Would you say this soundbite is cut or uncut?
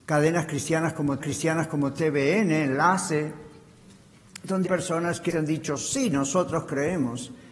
cut